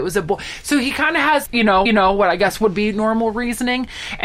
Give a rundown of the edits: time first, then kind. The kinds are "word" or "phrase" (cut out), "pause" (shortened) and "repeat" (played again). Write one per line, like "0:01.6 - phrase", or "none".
0:01.5 - word
0:01.9 - repeat

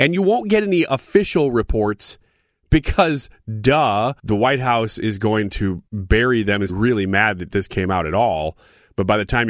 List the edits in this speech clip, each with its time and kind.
0:04.2 - pause
0:05.9 - pause
0:06.7 - word

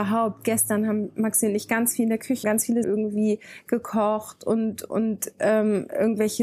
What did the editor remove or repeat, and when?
0:02.4 - phrase
0:02.8 - word

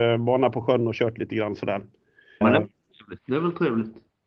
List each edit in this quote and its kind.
0:02.4 - word
0:03.2 - pause

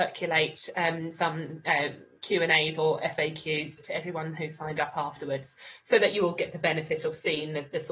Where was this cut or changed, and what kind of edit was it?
0:03.8 - word

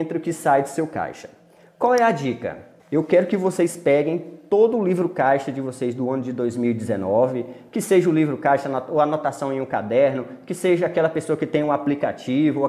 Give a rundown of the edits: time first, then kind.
0:02.8 - pause

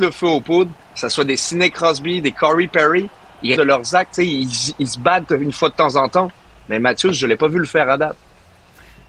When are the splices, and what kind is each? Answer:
0:03.6 - word

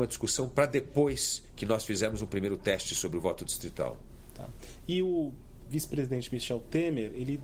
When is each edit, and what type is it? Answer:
0:05.7 - word

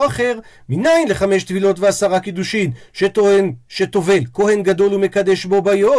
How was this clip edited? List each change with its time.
none

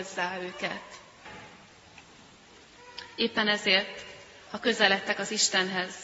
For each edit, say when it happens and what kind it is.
none

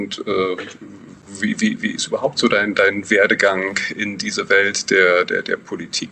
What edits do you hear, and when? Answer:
none

